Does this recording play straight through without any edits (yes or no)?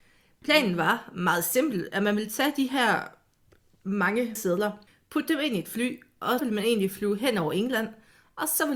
no